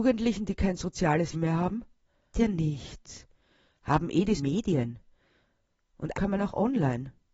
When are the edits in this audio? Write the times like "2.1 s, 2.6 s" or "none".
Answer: 1.3 s, 2.3 s, 4.4 s, 6.1 s